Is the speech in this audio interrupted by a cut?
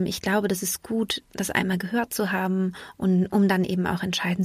yes; 1 cut; at 1.2 s

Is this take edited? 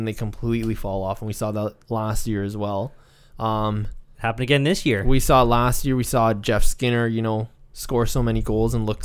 no; 0 cuts

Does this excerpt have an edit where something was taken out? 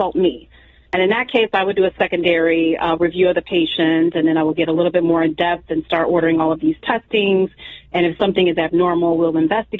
no; 0 cuts

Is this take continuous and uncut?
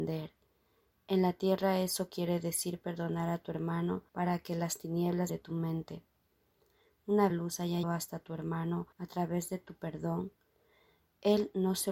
no; 5 cuts; at 4.1 s, 5.3 s, 7.3 s, 7.8 s, 8.9 s

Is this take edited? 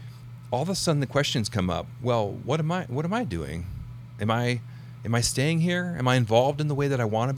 no; 0 cuts

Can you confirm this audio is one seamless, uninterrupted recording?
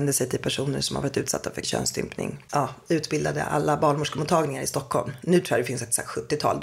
no; 1 cut; at 1.6 s

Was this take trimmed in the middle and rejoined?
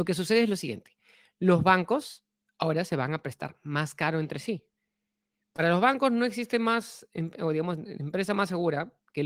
no; 0 cuts

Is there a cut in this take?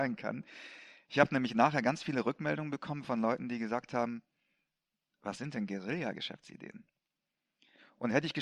no; 0 cuts

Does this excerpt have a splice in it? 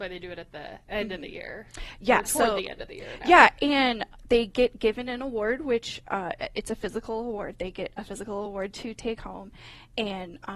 no; 0 cuts

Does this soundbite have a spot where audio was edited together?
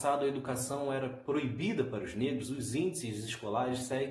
no; 0 cuts

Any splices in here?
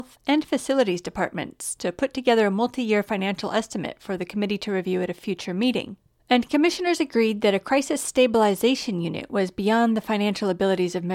yes; 1 cut; at 6.2 s

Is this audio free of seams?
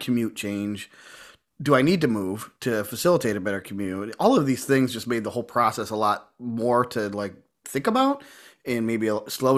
yes; 0 cuts

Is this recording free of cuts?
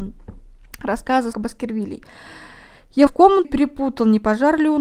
no; 3 cuts; at 1.3 s, 3.1 s, 3.4 s

